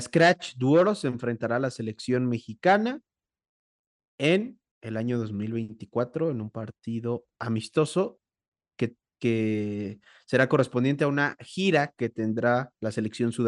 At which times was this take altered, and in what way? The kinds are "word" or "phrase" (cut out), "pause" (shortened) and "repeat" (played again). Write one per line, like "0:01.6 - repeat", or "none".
0:04.7 - pause